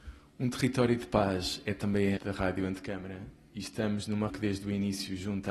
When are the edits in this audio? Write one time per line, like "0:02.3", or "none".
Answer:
0:02.2
0:04.3

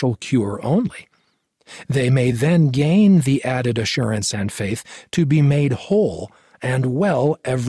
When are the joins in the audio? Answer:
none

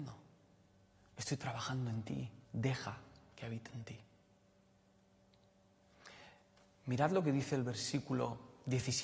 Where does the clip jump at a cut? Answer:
0:02.4

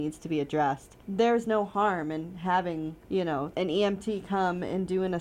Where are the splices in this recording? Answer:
0:01.0
0:03.0
0:03.5

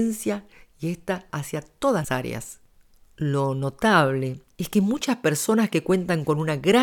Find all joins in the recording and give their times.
0:01.3
0:02.0
0:02.7
0:04.5

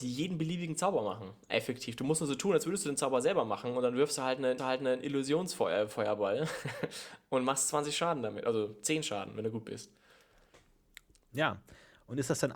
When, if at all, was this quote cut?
0:04.6

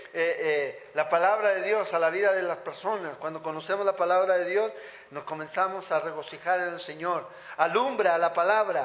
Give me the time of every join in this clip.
none

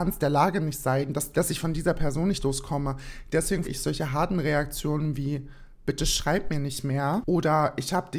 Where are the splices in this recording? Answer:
0:01.3
0:03.6

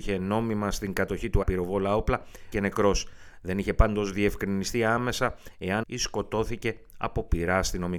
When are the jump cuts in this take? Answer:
0:01.4
0:02.5
0:05.8

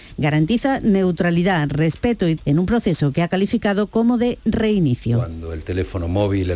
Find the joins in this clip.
0:02.4

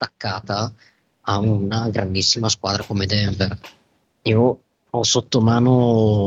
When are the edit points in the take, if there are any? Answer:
none

